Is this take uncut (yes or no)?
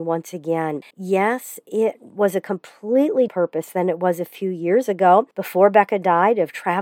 no